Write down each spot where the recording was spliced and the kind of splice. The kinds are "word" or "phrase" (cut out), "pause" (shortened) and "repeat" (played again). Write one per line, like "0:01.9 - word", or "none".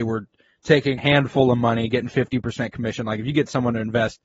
0:01.0 - word